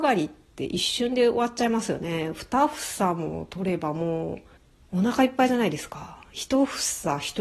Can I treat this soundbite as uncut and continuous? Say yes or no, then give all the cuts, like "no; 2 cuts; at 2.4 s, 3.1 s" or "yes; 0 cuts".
no; 1 cut; at 4.6 s